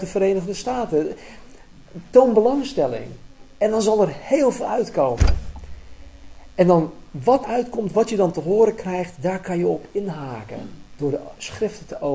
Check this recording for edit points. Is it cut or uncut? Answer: cut